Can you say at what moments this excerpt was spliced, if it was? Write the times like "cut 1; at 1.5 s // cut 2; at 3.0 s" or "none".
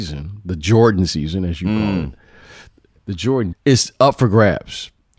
cut 1; at 3.5 s